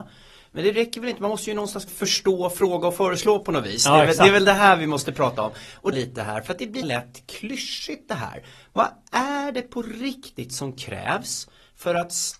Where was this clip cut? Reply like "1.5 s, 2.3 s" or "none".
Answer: 1.9 s, 5.9 s, 6.8 s

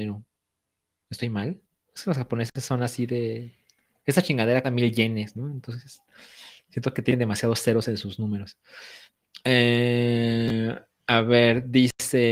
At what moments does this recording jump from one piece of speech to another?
1.8 s, 4.6 s

